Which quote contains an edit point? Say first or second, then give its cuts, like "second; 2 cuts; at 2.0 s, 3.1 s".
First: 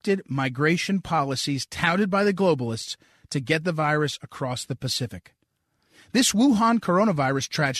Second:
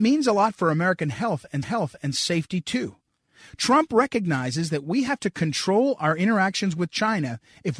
second; 1 cut; at 1.6 s